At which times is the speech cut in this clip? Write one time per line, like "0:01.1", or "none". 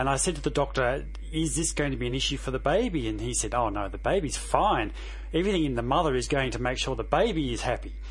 none